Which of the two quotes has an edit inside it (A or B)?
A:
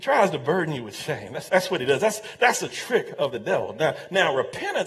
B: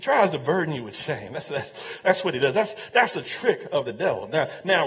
A